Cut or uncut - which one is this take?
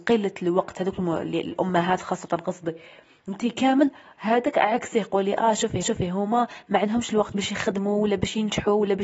cut